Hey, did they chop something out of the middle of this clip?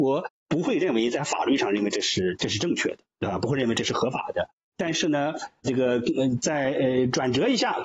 no; 0 cuts

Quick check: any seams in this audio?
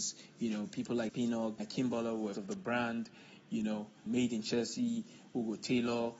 yes; 4 cuts; at 1.1 s, 1.6 s, 2.3 s, 4.1 s

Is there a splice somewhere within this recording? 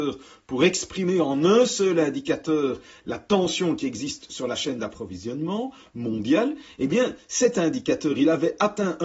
no; 0 cuts

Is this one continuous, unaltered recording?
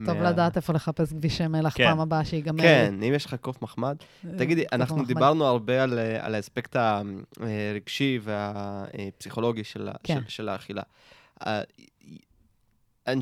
no; 1 cut; at 7.3 s

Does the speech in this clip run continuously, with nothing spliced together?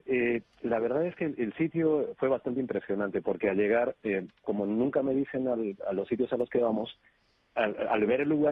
yes; 0 cuts

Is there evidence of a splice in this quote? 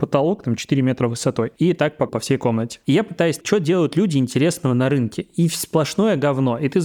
yes; 2 cuts; at 2.1 s, 3.4 s

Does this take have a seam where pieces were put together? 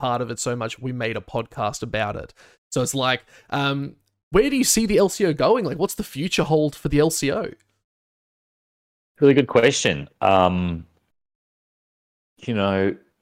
no; 0 cuts

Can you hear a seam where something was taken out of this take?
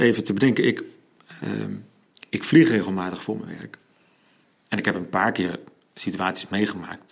no; 0 cuts

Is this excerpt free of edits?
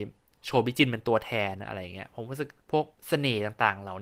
no; 2 cuts; at 2.6 s, 2.9 s

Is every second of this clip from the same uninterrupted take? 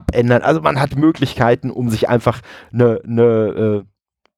no; 1 cut; at 0.9 s

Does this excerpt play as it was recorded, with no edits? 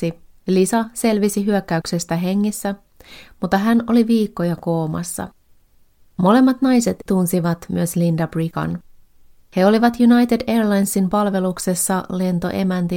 yes; 0 cuts

